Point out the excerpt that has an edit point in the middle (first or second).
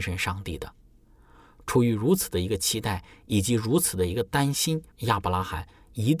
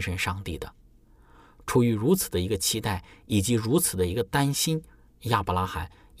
first